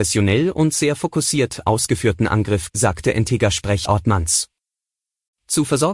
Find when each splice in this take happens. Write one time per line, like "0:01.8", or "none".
0:02.7
0:03.9